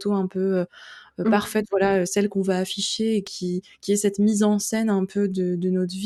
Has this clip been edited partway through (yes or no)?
no